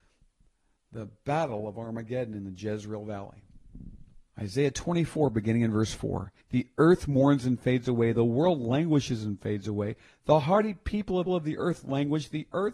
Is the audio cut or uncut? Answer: cut